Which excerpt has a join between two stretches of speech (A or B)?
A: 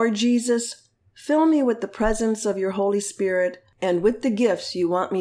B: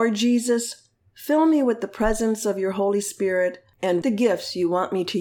B